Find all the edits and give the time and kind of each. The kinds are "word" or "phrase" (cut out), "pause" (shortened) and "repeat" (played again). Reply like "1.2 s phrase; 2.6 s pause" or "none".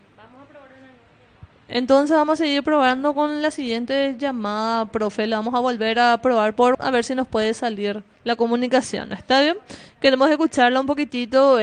6.7 s word; 8.1 s pause